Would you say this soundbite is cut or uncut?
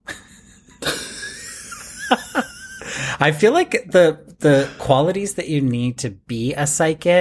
uncut